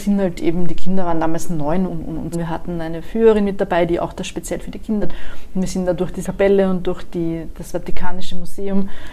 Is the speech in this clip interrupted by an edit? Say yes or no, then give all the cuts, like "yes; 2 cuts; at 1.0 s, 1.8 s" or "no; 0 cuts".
yes; 4 cuts; at 1.9 s, 2.3 s, 5.0 s, 6.2 s